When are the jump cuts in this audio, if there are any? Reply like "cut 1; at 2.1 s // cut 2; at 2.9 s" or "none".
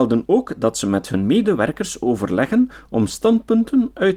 none

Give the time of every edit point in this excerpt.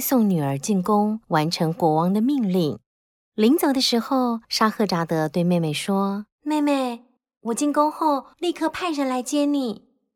cut 1; at 1.2 s // cut 2; at 2.9 s // cut 3; at 4.4 s // cut 4; at 6.3 s // cut 5; at 7.2 s // cut 6; at 8.3 s

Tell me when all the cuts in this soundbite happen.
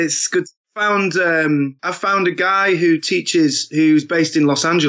cut 1; at 1.8 s

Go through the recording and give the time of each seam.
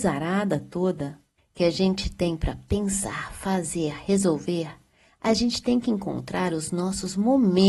cut 1; at 1.4 s

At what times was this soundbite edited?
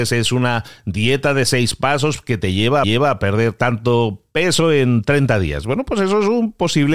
cut 1; at 2.8 s

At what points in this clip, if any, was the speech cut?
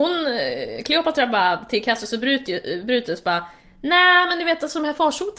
none

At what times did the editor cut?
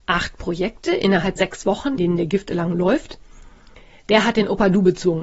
cut 1; at 1.4 s // cut 2; at 2.0 s

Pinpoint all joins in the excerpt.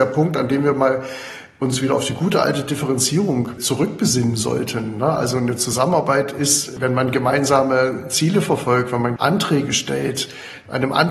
cut 1; at 9.2 s

